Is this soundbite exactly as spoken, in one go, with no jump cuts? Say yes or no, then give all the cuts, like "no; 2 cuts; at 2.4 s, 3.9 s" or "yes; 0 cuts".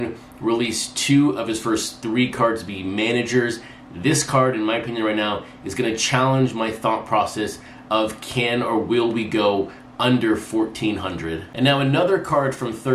yes; 0 cuts